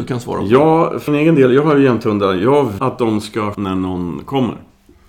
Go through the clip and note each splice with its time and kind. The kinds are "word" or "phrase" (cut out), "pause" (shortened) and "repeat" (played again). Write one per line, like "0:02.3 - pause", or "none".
0:01.1 - word
0:02.8 - word
0:03.5 - word

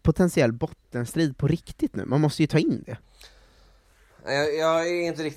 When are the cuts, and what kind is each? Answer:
none

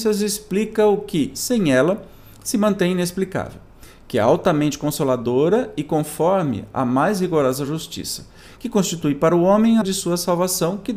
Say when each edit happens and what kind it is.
0:09.8 - word

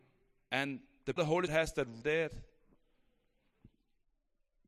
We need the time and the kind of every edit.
0:01.2 - word
0:01.5 - word
0:02.0 - phrase

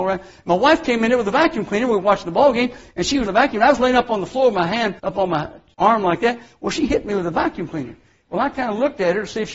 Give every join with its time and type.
0:03.3 - word
0:05.0 - pause
0:05.7 - word

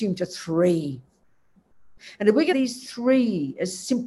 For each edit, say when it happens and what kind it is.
0:02.5 - word

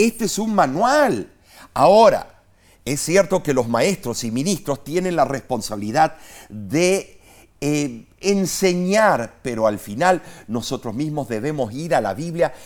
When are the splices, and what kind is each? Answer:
none

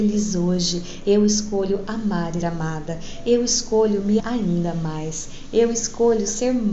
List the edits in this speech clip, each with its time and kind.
0:02.4 - word
0:04.2 - word

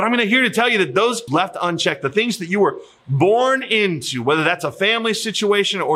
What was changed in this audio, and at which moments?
0:01.3 - word

